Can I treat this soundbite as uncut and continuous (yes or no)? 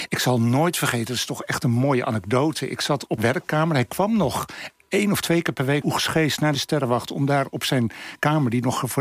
no